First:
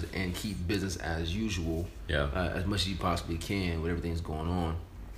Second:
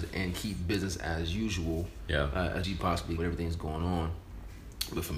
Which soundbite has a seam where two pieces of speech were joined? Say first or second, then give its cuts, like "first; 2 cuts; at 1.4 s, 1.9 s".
second; 2 cuts; at 2.6 s, 3.2 s